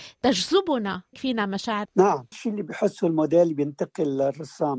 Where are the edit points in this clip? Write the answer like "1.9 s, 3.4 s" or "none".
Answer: 1.1 s, 1.8 s, 2.3 s